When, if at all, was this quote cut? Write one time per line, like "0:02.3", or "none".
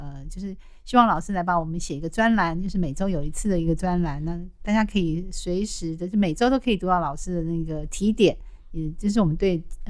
none